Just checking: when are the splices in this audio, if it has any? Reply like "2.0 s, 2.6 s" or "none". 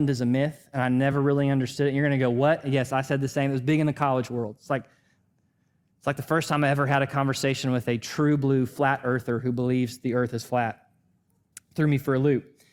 none